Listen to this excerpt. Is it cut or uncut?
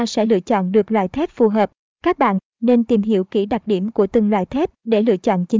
uncut